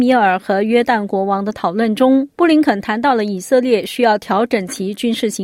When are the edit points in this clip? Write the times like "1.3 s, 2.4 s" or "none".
2.3 s